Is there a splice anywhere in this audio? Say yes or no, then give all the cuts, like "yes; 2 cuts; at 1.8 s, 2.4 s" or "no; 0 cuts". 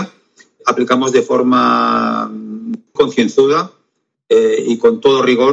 yes; 1 cut; at 3.0 s